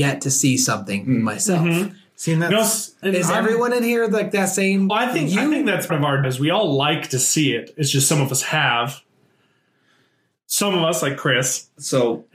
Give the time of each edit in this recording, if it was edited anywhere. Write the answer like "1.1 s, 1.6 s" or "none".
3.0 s, 4.9 s, 5.9 s, 6.2 s